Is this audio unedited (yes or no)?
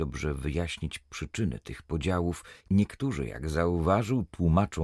no